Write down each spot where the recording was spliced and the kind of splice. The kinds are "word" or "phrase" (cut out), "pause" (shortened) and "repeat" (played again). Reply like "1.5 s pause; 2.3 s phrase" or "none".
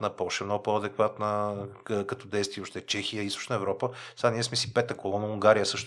none